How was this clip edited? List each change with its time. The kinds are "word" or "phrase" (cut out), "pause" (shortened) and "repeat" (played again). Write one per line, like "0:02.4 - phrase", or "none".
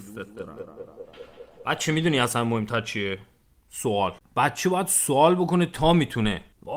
none